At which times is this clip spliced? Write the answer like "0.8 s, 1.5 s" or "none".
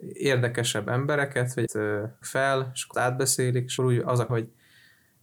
1.7 s, 2.2 s, 2.9 s, 3.8 s, 4.3 s